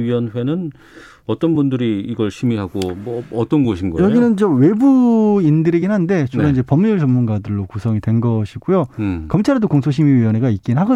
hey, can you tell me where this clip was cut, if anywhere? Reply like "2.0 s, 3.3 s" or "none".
none